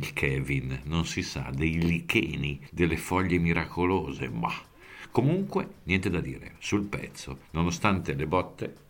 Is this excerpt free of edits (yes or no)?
no